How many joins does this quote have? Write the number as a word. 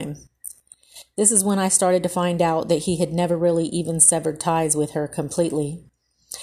zero